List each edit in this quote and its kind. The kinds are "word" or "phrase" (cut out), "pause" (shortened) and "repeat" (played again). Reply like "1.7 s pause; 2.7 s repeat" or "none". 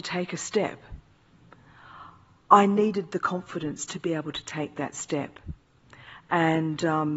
none